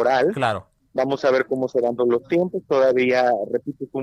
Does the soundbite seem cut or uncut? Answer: cut